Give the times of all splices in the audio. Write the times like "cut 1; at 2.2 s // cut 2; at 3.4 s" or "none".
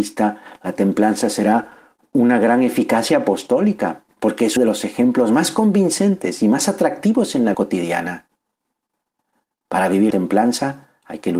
cut 1; at 4.1 s // cut 2; at 4.6 s // cut 3; at 7.5 s // cut 4; at 10.1 s